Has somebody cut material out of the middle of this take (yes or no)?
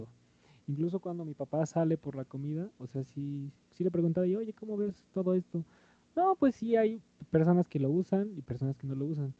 no